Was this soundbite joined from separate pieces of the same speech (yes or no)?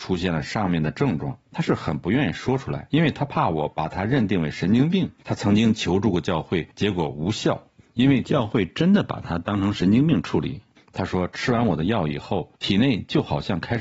yes